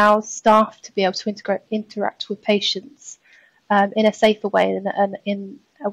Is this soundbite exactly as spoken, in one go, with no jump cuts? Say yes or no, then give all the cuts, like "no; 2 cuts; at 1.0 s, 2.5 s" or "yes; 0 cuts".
yes; 0 cuts